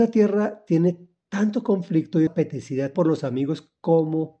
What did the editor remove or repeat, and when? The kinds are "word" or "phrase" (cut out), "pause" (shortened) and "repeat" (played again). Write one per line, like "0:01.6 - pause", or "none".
0:02.3 - word
0:02.9 - word

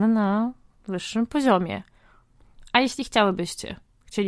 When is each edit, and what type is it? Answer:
none

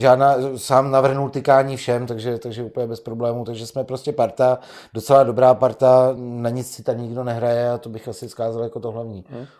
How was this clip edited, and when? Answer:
none

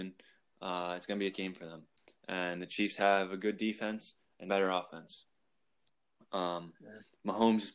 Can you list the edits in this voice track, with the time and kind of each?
0:01.3 - word
0:04.5 - word

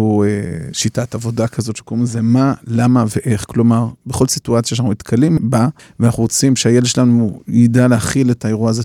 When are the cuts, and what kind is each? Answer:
0:05.8 - pause

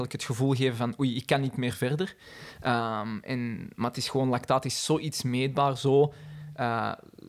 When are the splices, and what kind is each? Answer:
none

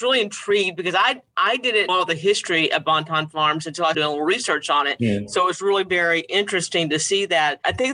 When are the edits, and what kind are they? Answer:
0:01.3 - pause
0:01.9 - word
0:03.9 - word

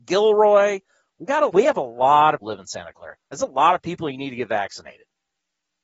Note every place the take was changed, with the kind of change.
0:01.5 - word
0:02.4 - word
0:03.2 - word

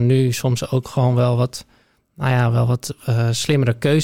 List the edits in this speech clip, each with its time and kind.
none

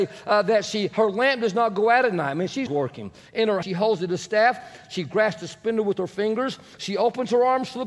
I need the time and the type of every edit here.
0:02.7 - word
0:03.6 - word

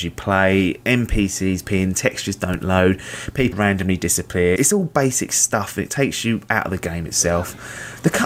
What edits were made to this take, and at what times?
0:01.7 - word
0:03.5 - word
0:04.6 - word

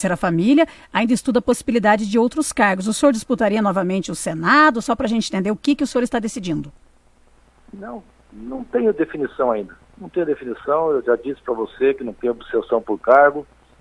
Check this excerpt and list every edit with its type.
none

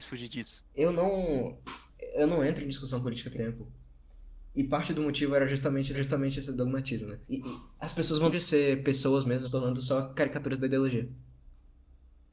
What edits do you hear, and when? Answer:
0:01.9 - pause
0:03.3 - word
0:05.9 - repeat
0:07.2 - pause
0:08.3 - word
0:09.4 - word

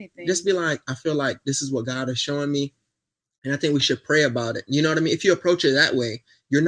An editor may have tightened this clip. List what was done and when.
none

